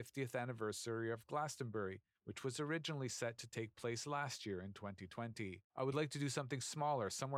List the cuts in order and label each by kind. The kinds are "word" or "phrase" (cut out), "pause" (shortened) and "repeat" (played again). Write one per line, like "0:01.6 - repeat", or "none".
none